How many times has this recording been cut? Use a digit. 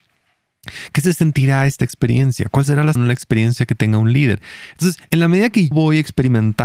2